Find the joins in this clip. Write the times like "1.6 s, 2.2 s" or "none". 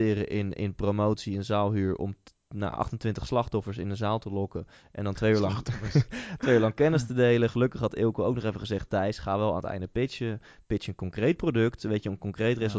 none